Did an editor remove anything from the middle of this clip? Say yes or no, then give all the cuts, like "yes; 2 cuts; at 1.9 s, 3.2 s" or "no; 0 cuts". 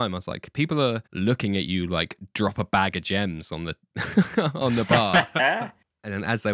yes; 1 cut; at 1.1 s